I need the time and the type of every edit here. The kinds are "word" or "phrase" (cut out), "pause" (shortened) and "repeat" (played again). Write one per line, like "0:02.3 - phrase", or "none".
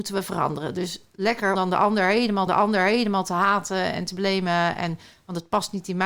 0:01.5 - word
0:02.5 - repeat